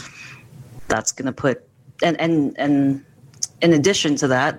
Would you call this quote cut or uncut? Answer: uncut